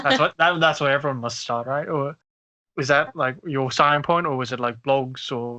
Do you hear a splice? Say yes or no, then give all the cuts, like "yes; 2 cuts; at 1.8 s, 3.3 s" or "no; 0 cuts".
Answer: no; 0 cuts